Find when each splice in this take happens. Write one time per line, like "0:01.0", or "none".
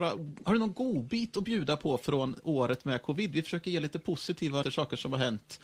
0:04.6